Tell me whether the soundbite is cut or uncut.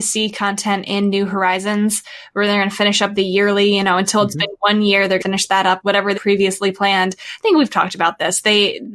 cut